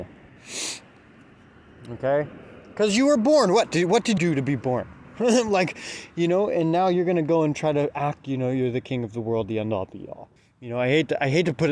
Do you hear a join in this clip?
yes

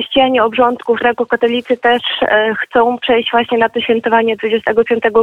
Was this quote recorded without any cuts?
no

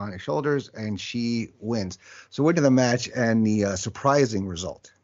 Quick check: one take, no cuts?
no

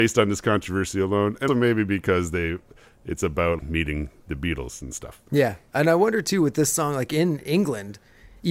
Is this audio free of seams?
no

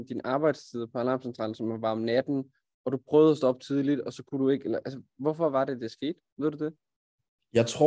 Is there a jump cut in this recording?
no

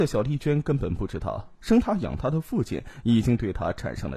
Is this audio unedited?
no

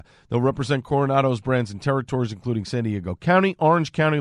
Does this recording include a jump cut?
no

